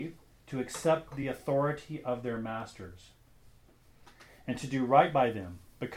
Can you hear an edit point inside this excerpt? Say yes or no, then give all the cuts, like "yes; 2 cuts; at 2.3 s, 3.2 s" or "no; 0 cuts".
no; 0 cuts